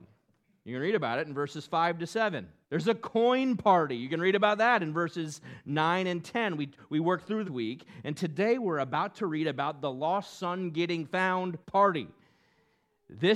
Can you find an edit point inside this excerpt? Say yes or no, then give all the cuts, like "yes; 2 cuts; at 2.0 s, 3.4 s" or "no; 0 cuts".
yes; 3 cuts; at 2.6 s, 7.4 s, 11.6 s